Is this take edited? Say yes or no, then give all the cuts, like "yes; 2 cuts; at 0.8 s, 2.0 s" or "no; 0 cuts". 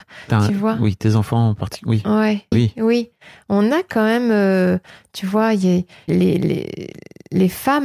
yes; 2 cuts; at 2.5 s, 6.1 s